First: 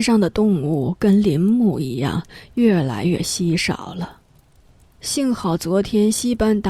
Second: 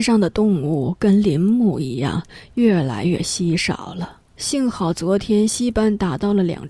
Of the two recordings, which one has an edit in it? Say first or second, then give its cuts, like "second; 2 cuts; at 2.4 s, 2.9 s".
second; 1 cut; at 4.3 s